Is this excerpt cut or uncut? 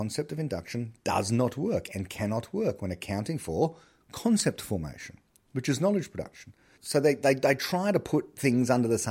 uncut